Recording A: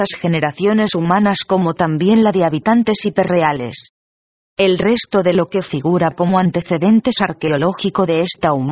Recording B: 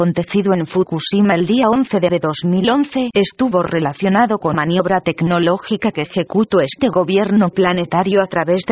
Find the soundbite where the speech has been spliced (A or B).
B